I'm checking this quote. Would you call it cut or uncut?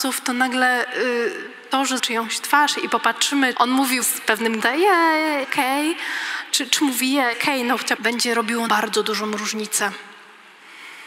cut